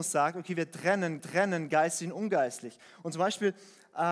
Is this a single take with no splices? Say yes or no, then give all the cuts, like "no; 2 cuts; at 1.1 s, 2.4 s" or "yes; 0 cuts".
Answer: no; 1 cut; at 1.2 s